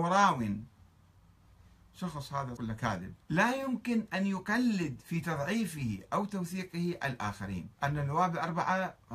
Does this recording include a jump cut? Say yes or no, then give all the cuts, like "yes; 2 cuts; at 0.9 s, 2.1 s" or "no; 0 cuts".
yes; 3 cuts; at 2.6 s, 3.2 s, 7.7 s